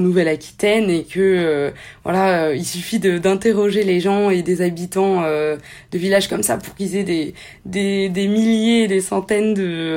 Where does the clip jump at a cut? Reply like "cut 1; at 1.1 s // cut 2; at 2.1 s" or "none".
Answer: none